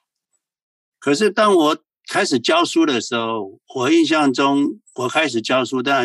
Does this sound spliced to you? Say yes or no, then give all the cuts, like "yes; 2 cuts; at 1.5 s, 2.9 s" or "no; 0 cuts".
yes; 1 cut; at 3.6 s